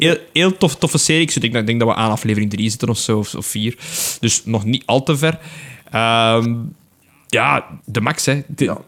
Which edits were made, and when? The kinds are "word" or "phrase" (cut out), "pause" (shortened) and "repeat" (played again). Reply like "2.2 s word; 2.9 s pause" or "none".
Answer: 7.8 s pause